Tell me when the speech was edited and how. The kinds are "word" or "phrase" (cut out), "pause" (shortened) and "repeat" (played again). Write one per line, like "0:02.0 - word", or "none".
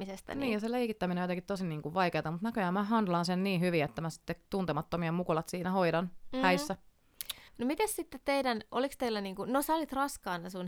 0:07.5 - pause